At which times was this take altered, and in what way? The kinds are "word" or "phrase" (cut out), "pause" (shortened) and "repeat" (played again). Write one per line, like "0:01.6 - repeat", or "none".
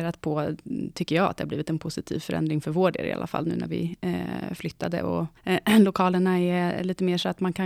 0:05.4 - pause